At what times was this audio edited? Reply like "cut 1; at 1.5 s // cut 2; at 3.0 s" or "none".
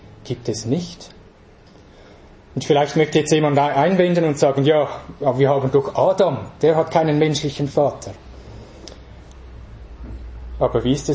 none